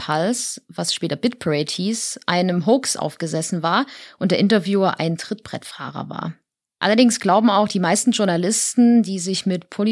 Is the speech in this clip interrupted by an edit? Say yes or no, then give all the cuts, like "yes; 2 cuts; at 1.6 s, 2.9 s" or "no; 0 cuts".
no; 0 cuts